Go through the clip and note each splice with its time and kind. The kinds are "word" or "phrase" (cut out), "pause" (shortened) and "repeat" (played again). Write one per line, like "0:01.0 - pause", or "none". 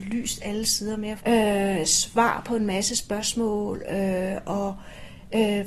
0:01.2 - word